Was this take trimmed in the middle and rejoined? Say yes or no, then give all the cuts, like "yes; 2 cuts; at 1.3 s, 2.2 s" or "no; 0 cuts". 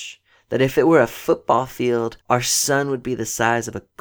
yes; 1 cut; at 2.2 s